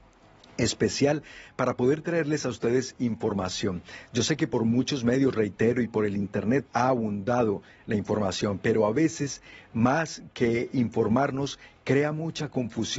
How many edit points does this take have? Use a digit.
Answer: 1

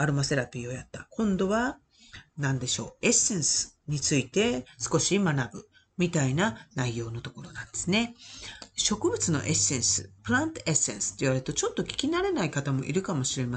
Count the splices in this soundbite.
1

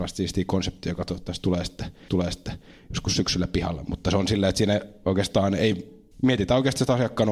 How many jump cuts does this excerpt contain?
2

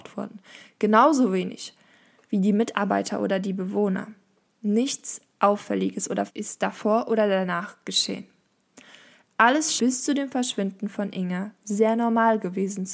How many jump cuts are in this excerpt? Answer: 2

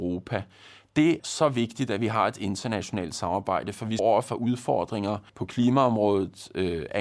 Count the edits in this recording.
3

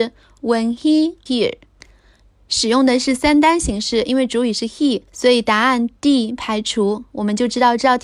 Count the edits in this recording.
2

